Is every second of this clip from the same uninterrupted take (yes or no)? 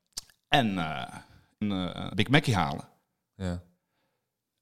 no